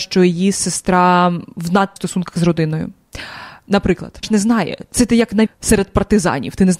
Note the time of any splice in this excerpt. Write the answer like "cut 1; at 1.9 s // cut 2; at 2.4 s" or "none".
cut 1; at 2.0 s // cut 2; at 4.2 s // cut 3; at 5.5 s